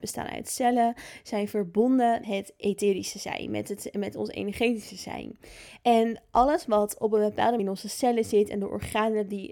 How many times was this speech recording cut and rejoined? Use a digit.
2